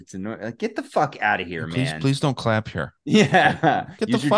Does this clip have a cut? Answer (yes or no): no